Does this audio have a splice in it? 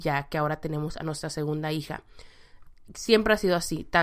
no; 0 cuts

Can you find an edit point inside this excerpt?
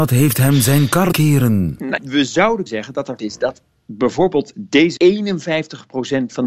yes; 6 cuts; at 1.1 s, 2.0 s, 2.7 s, 3.2 s, 4.5 s, 5.0 s

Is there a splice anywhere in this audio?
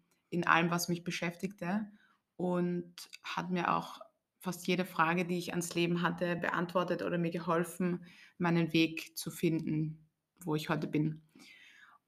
no; 0 cuts

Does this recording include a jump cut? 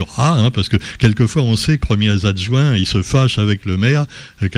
yes; 1 cut; at 1.8 s

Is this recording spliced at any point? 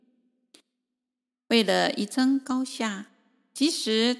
no; 0 cuts

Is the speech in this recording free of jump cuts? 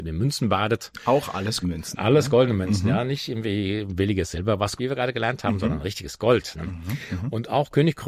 no; 2 cuts; at 1.6 s, 4.8 s

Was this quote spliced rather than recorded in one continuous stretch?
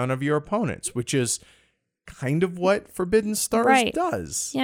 no; 0 cuts

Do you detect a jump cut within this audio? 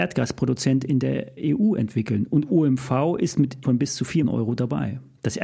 yes; 2 cuts; at 3.6 s, 4.2 s

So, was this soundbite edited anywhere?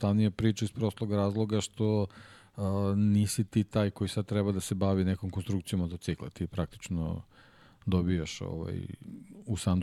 no; 0 cuts

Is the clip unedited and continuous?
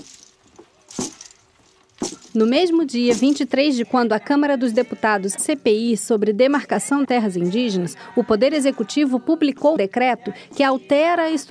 no; 4 cuts; at 3.8 s, 5.4 s, 7.0 s, 9.8 s

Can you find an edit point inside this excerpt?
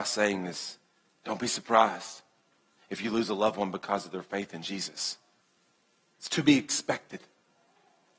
no; 0 cuts

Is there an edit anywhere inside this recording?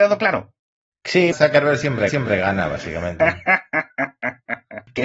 yes; 2 cuts; at 1.3 s, 2.1 s

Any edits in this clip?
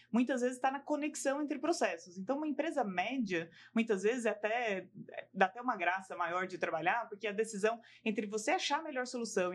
no; 0 cuts

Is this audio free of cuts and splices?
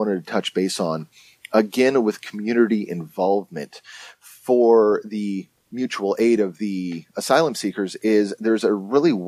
yes; 0 cuts

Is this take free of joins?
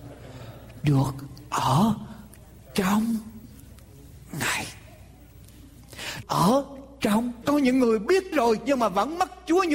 no; 3 cuts; at 6.2 s, 7.4 s, 8.3 s

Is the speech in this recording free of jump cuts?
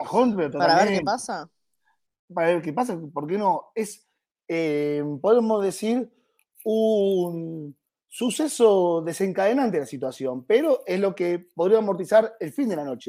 yes; 0 cuts

